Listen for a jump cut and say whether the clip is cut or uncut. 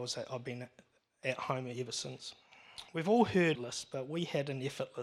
cut